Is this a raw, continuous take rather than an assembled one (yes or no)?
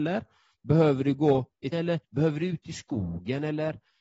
no